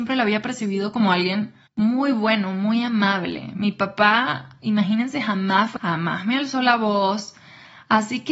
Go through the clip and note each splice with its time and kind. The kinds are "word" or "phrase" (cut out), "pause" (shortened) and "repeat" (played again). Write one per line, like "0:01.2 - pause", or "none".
0:01.7 - pause
0:05.8 - word